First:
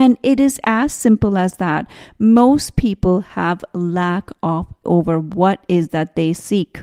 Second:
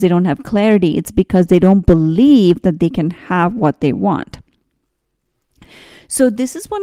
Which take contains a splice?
first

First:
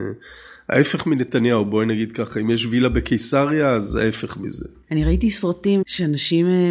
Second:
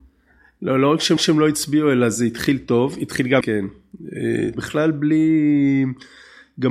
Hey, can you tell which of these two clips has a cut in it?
second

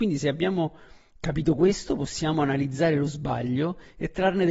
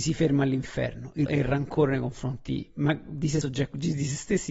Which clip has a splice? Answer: second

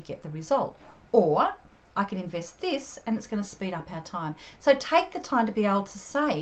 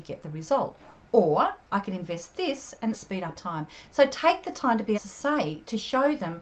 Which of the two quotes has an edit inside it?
second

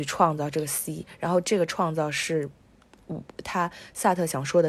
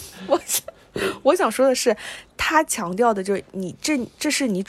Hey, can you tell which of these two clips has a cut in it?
second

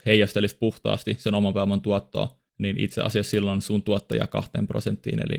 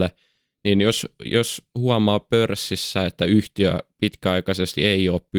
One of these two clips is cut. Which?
first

